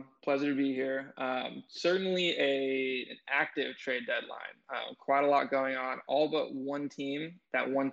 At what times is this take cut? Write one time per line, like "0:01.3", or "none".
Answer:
none